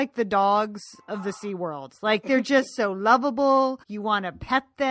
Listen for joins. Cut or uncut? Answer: cut